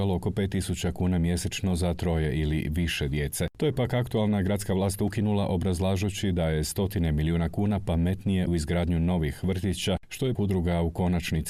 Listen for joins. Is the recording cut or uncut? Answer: cut